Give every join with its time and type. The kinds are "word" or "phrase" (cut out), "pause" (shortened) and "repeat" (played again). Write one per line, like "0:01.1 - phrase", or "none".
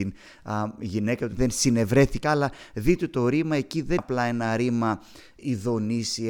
0:01.3 - phrase
0:02.2 - word
0:04.0 - word